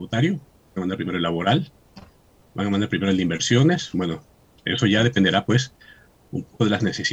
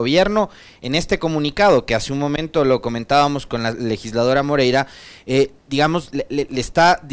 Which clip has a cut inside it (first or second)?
second